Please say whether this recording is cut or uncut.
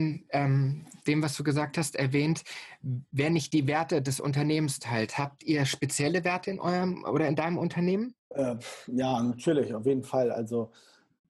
cut